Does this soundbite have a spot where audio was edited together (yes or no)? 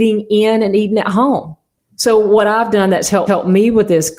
yes